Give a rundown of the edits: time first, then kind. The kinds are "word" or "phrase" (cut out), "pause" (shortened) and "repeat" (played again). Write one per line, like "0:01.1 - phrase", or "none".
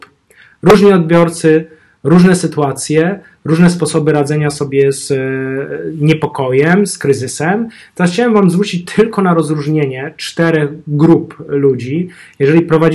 none